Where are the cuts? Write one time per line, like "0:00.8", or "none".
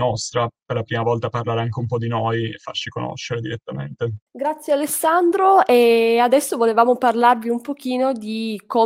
0:04.3